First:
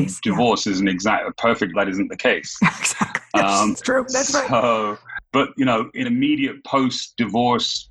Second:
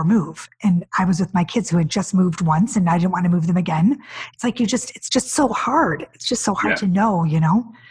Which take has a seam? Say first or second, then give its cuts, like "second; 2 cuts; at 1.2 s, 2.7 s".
first; 3 cuts; at 1.7 s, 3.7 s, 6.0 s